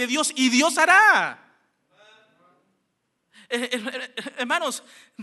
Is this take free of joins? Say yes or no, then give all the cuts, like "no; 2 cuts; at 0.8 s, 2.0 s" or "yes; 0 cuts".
yes; 0 cuts